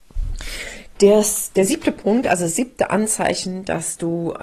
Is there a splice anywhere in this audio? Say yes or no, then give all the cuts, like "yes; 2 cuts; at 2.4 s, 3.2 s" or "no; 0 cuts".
no; 0 cuts